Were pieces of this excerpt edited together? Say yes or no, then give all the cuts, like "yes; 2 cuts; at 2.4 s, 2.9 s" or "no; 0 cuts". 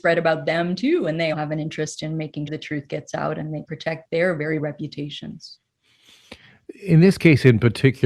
yes; 4 cuts; at 1.3 s, 2.5 s, 3.6 s, 4.6 s